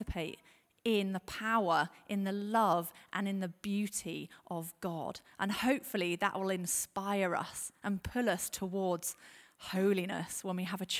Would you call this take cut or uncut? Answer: uncut